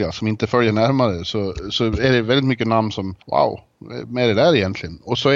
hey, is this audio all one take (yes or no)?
no